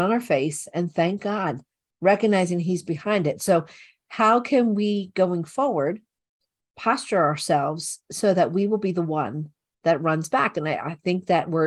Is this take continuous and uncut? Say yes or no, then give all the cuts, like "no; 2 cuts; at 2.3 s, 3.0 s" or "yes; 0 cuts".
yes; 0 cuts